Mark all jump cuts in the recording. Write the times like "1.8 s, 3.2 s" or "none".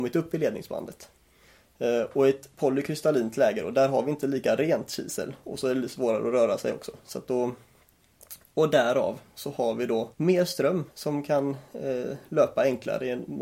10.1 s, 10.9 s, 11.7 s